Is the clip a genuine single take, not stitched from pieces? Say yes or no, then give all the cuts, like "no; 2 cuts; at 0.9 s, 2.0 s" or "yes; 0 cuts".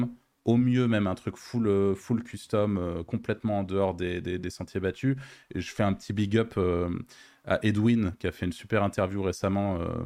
yes; 0 cuts